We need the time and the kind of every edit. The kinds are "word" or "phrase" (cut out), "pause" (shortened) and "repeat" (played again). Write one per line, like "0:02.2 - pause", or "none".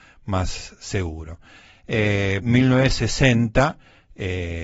0:02.4 - phrase